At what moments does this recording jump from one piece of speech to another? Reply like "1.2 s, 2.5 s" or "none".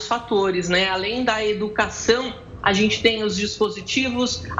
none